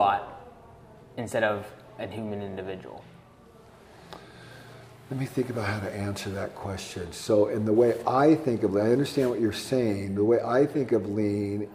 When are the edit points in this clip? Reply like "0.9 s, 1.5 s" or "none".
none